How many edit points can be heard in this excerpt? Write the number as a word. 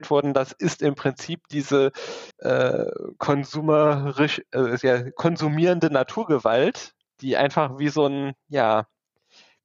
three